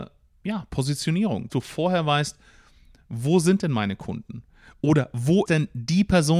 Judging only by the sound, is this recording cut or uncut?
cut